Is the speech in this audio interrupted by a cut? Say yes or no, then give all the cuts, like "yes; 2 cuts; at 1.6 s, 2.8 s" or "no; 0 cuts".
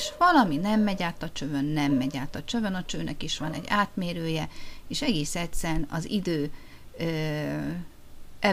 no; 0 cuts